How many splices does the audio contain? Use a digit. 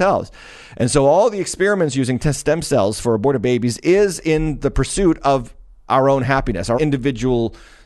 2